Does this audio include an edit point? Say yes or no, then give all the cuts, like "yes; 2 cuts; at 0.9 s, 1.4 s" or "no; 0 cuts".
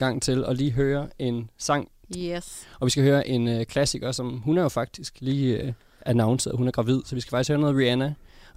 no; 0 cuts